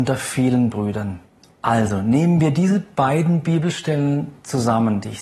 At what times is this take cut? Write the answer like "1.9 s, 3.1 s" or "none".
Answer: 1.3 s